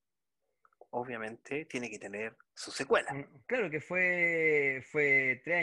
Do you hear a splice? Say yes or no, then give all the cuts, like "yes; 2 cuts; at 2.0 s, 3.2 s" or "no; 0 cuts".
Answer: yes; 2 cuts; at 2.4 s, 3.4 s